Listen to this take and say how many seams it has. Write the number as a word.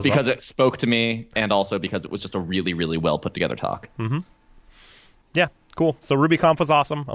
zero